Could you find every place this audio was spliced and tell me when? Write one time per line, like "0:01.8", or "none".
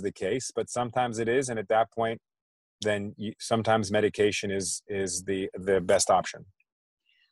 none